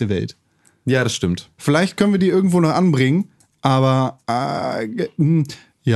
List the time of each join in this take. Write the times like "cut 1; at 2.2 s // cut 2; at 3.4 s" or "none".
cut 1; at 4.2 s